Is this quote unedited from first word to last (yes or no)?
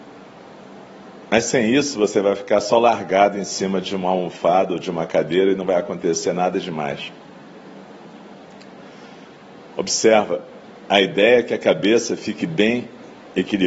yes